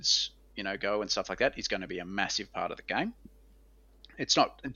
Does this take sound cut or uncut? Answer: uncut